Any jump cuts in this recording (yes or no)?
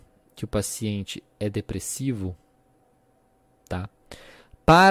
no